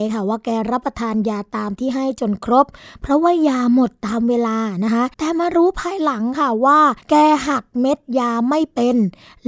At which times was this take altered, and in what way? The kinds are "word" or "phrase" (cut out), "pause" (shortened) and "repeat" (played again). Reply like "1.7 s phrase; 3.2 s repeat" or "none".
5.1 s pause; 7.0 s pause